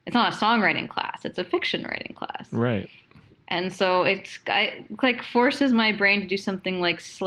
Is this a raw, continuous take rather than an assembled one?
yes; 0 cuts

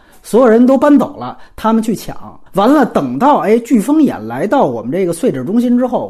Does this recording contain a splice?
yes; 1 cut; at 2.5 s

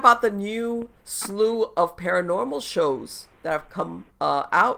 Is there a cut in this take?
yes; 1 cut; at 1.0 s

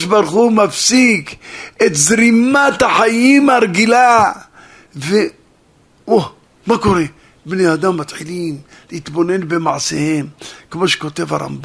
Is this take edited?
no; 0 cuts

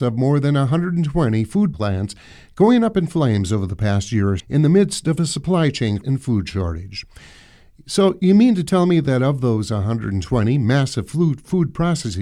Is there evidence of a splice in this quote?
yes; 3 cuts; at 1.7 s, 4.4 s, 6.0 s

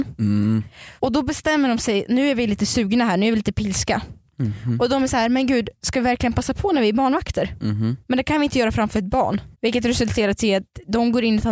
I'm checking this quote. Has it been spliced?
yes; 3 cuts; at 1.0 s, 8.0 s, 9.5 s

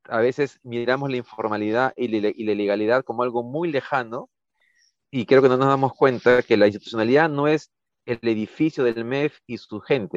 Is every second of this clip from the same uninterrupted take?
yes; 0 cuts

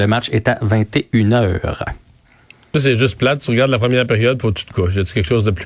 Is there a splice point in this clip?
no; 0 cuts

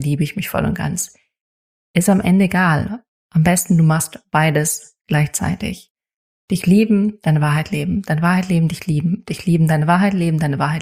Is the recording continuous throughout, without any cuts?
yes; 0 cuts

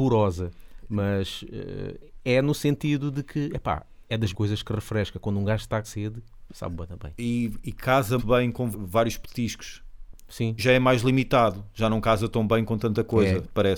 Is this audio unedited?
no; 6 cuts; at 4.3 s, 5.8 s, 6.5 s, 8.2 s, 8.7 s, 10.6 s

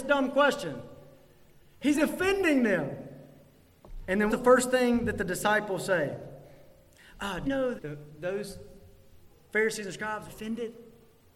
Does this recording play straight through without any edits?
no; 5 cuts; at 1.9 s, 4.3 s, 7.4 s, 7.8 s, 10.3 s

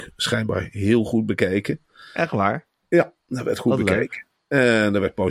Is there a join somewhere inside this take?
no; 0 cuts

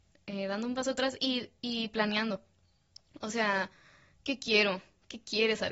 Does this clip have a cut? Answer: no; 0 cuts

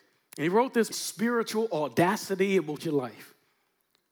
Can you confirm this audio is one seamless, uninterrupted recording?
no; 2 cuts; at 0.9 s, 2.8 s

